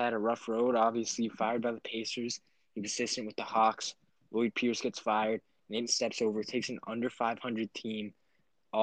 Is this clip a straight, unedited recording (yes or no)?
no